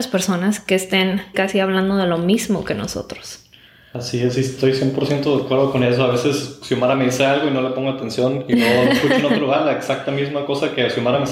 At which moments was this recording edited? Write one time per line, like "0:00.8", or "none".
0:01.3